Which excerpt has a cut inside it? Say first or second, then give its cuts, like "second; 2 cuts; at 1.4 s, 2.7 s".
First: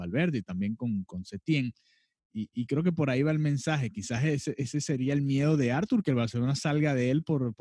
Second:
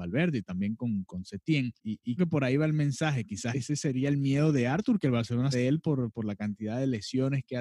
second; 4 cuts; at 1.8 s, 2.2 s, 3.5 s, 5.5 s